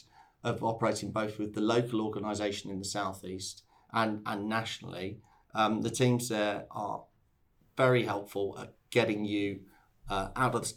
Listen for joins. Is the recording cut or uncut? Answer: uncut